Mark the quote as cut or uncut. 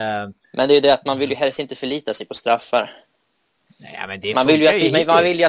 uncut